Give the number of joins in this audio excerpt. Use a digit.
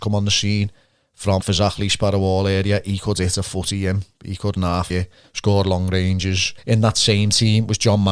3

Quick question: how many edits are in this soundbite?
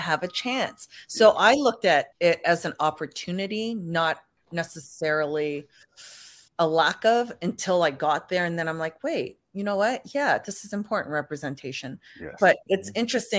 3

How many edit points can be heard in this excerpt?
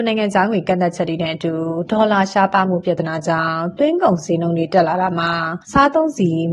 1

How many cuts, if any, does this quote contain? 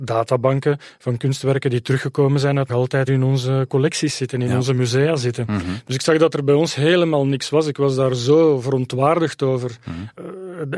2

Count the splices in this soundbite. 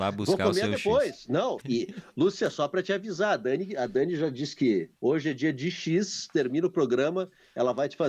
2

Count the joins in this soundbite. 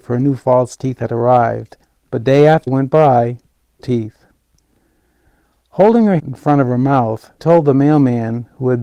5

